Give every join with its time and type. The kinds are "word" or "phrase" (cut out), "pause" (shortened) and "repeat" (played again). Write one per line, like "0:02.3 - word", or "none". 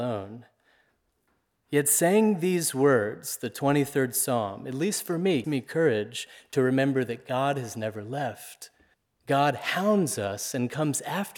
0:05.4 - word
0:08.9 - pause